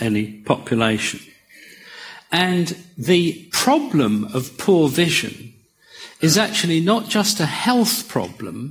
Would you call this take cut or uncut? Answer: uncut